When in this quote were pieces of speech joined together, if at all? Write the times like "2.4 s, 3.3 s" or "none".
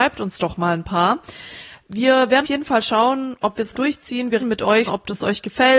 2.4 s, 3.7 s, 4.4 s, 4.9 s